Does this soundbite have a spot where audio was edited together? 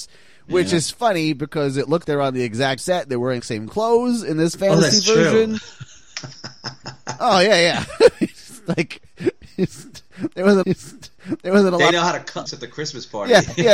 yes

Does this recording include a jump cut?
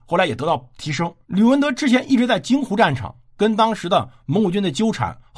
yes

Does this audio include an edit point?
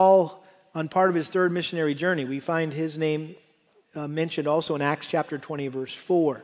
no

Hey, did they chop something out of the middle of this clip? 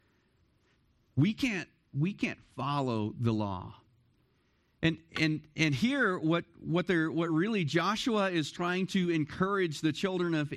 no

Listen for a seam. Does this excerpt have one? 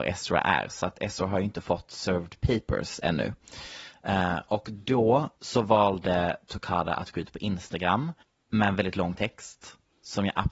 yes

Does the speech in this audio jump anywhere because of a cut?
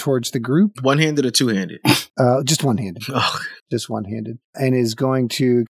no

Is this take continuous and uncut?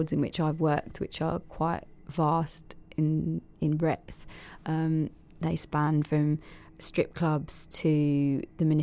yes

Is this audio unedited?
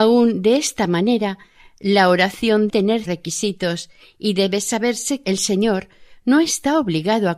no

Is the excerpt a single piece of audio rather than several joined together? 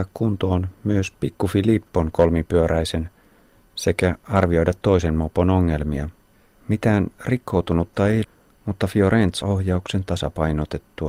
no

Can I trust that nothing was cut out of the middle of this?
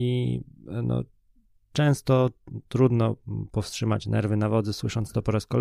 yes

